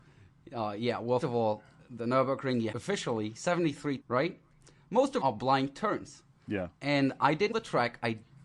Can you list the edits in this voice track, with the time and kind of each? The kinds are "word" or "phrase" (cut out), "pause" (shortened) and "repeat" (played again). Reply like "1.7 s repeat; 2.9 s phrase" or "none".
1.2 s word; 2.7 s word; 4.0 s word; 5.2 s word; 7.5 s word